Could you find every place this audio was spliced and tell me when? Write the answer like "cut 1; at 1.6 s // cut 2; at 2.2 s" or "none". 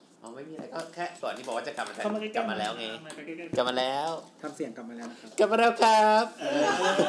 cut 1; at 1.2 s